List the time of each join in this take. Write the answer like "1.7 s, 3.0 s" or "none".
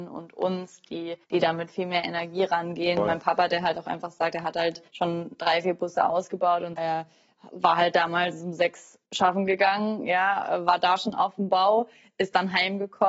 1.2 s, 4.9 s, 6.8 s, 9.1 s